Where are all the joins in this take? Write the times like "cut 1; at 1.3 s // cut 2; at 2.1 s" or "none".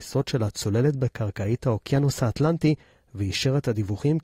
none